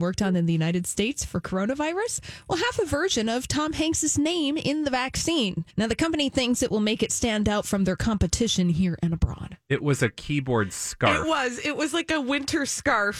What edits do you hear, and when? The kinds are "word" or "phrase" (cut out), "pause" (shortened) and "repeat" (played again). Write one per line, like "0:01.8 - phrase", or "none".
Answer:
0:05.7 - pause